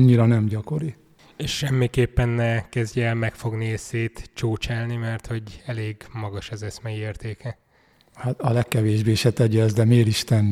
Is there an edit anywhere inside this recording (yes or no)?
no